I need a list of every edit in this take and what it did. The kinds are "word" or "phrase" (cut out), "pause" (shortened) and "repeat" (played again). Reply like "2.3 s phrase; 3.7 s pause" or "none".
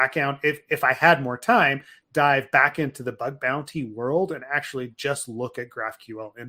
none